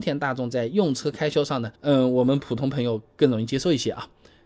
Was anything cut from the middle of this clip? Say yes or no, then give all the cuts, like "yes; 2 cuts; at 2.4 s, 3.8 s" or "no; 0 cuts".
yes; 1 cut; at 1.7 s